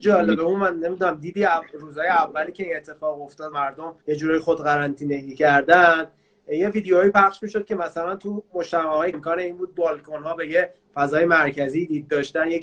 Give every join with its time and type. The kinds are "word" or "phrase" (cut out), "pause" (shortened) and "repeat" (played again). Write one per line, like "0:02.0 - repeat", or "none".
0:03.5 - word
0:04.0 - pause
0:09.1 - word